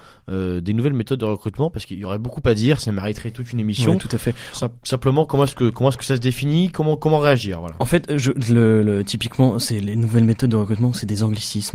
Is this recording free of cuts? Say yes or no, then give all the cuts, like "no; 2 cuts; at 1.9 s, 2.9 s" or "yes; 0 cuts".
no; 1 cut; at 4.8 s